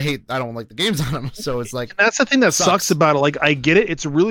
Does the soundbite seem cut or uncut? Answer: uncut